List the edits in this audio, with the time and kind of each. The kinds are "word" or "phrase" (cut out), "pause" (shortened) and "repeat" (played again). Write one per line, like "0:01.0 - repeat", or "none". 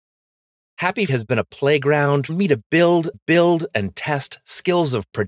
0:01.1 - word
0:02.3 - word
0:03.1 - repeat